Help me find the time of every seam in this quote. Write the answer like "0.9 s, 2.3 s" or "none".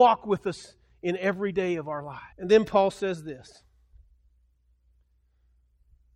2.3 s